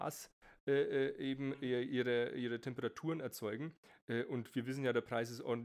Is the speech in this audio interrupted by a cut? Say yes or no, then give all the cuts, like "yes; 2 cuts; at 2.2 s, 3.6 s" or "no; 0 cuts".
no; 0 cuts